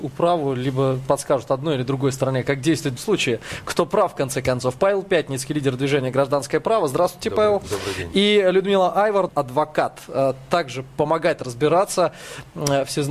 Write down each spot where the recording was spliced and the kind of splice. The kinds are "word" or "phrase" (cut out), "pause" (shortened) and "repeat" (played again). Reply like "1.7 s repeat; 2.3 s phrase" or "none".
3.0 s word; 9.3 s phrase